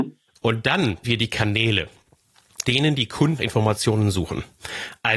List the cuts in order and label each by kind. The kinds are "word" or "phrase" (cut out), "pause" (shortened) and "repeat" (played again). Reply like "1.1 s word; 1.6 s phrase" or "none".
1.0 s word; 2.6 s word; 3.4 s word

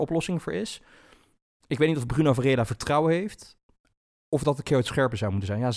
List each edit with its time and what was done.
none

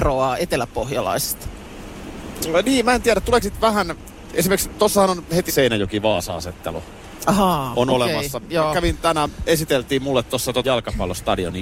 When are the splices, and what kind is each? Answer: 3.4 s word; 5.5 s word; 10.6 s word

